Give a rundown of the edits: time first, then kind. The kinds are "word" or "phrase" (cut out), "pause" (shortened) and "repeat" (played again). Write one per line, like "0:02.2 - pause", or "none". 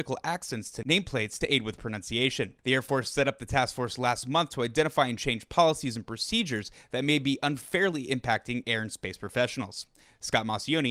none